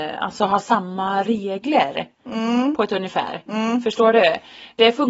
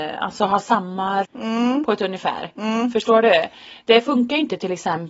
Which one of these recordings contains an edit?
second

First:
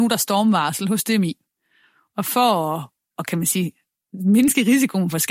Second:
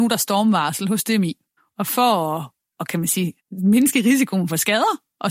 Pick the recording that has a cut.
second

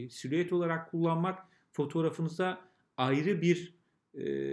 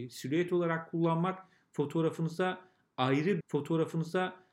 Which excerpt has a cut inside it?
second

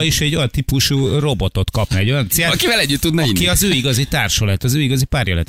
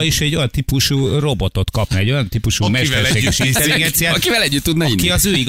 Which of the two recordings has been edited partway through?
first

